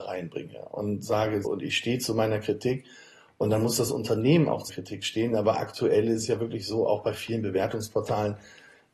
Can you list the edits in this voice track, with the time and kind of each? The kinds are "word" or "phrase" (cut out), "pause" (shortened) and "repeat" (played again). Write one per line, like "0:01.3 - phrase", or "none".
0:01.4 - word
0:04.7 - word